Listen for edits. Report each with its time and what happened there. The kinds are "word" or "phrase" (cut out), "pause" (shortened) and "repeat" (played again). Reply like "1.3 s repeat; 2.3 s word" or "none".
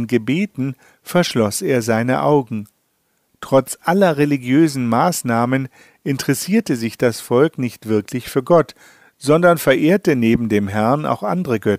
none